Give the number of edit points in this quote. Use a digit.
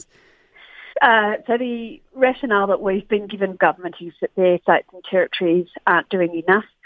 4